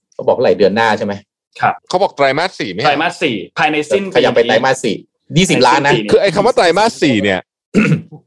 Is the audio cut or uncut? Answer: cut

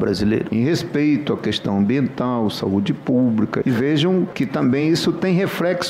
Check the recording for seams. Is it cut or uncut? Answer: uncut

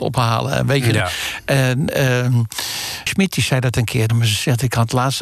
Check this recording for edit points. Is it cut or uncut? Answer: cut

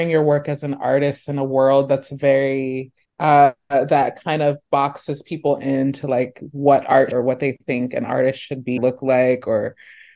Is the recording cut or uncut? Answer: cut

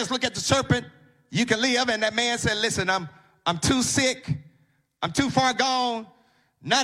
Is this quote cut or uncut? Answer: uncut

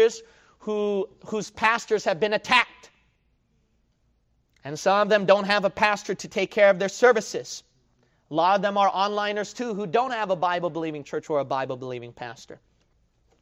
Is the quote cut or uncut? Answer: uncut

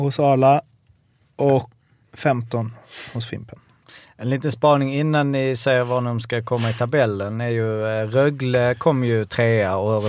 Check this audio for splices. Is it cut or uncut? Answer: cut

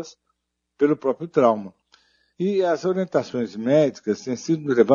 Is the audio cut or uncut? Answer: uncut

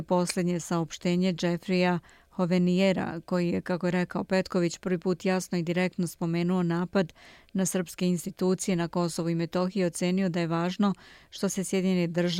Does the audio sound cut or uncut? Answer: uncut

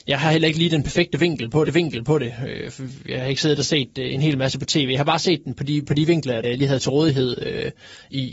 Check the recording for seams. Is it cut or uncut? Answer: cut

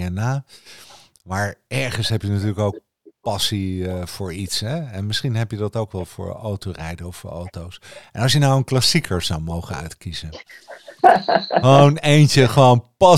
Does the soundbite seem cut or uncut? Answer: uncut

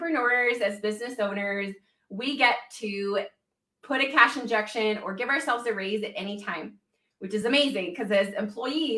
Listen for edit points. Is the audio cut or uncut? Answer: uncut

